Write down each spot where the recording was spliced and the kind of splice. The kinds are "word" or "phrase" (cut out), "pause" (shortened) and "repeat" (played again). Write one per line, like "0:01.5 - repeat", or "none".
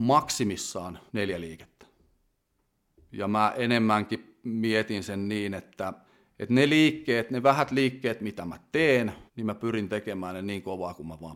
0:01.1 - pause
0:06.1 - pause
0:09.3 - pause